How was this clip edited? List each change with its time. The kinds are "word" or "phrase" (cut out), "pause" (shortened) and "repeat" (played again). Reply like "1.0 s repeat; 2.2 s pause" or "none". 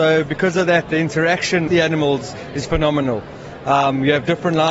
1.7 s word